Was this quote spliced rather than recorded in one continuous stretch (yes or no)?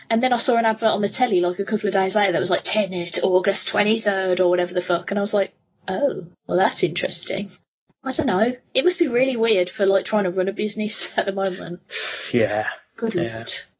no